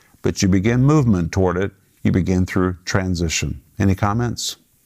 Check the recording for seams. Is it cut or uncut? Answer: uncut